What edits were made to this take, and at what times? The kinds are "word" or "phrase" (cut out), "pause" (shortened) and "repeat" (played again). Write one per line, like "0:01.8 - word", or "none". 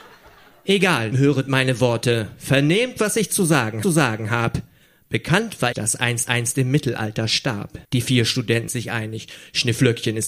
0:01.1 - word
0:03.8 - repeat
0:05.7 - phrase
0:06.3 - repeat
0:07.8 - pause
0:08.7 - word